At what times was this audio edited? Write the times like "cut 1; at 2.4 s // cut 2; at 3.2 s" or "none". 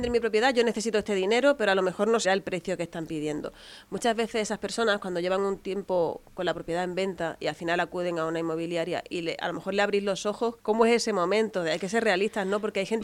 cut 1; at 2.2 s // cut 2; at 6.3 s // cut 3; at 10.6 s